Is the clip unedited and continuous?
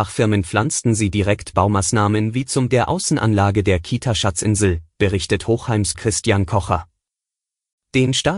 no; 3 cuts; at 1.5 s, 2.7 s, 5.9 s

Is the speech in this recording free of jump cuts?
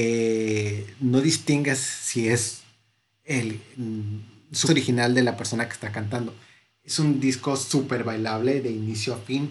no; 1 cut; at 4.6 s

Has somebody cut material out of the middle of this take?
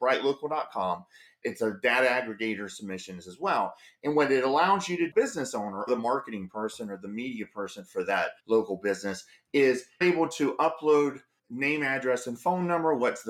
yes; 6 cuts; at 1.4 s, 5.1 s, 5.9 s, 8.4 s, 10.0 s, 11.4 s

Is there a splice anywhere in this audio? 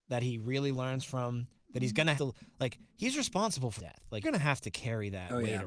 yes; 4 cuts; at 2.2 s, 2.9 s, 3.8 s, 4.2 s

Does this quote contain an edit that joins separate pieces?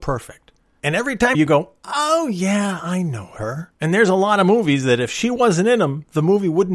yes; 2 cuts; at 1.3 s, 3.7 s

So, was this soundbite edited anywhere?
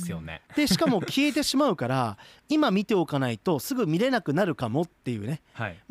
no; 0 cuts

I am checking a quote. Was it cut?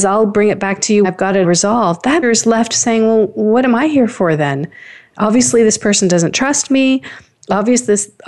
yes; 3 cuts; at 1.0 s, 1.4 s, 2.2 s

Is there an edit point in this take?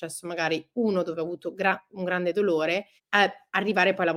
yes; 1 cut; at 3.0 s

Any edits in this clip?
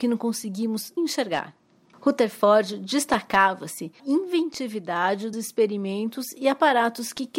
yes; 3 cuts; at 1.0 s, 4.0 s, 5.3 s

